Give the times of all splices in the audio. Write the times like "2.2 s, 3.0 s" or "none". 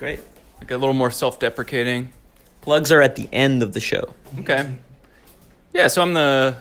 none